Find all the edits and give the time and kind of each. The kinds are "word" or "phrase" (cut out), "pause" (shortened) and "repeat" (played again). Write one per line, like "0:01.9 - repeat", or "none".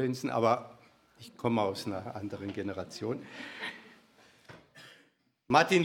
none